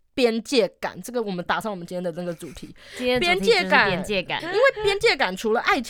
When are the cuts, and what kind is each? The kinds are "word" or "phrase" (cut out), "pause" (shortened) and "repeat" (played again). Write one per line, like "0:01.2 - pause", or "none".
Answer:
0:04.4 - word